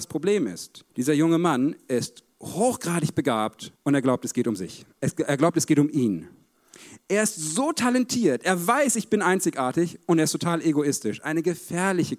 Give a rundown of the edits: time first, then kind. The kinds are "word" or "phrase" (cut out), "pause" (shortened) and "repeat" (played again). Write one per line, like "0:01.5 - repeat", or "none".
0:00.9 - pause
0:02.3 - pause
0:03.8 - pause
0:04.9 - pause